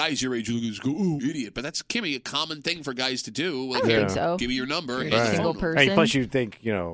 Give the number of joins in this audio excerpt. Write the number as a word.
one